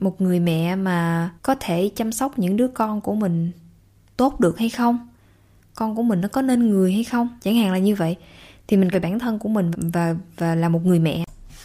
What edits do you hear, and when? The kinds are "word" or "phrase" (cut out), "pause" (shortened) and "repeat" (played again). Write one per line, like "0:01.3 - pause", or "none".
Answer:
0:01.4 - pause
0:07.4 - pause
0:08.9 - phrase
0:09.7 - word

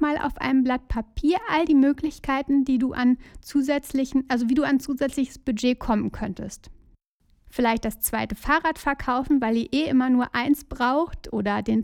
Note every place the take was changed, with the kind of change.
none

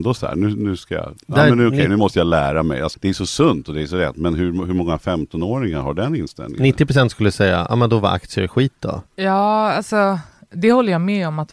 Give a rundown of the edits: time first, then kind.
0:02.9 - word
0:09.1 - pause

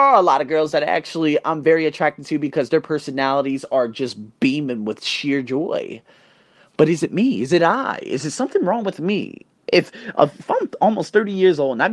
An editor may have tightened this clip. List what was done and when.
none

